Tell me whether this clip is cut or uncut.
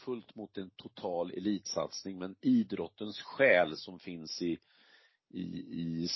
uncut